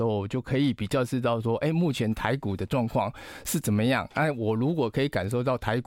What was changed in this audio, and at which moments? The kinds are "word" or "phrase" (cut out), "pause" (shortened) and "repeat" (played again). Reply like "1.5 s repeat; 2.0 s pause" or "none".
none

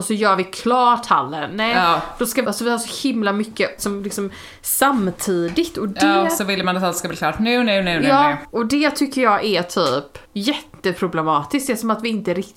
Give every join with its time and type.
2.4 s phrase; 3.8 s phrase; 8.5 s pause; 10.2 s pause

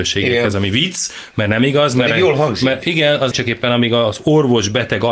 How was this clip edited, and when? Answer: 3.3 s word

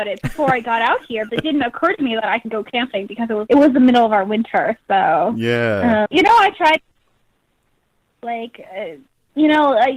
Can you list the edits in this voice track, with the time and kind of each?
1.3 s word; 2.4 s word; 3.5 s word; 6.1 s word

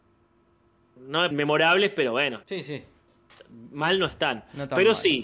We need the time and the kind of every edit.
1.3 s word; 2.4 s pause

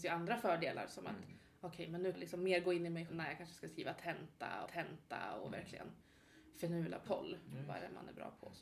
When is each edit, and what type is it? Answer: 2.1 s phrase; 3.1 s word; 4.7 s repeat; 7.1 s word

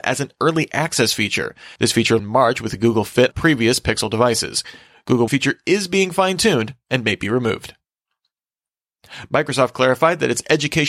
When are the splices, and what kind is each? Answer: 1.8 s pause; 2.2 s phrase; 3.3 s word; 5.3 s phrase

